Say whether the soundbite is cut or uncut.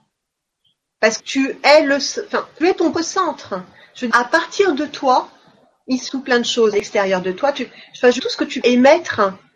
cut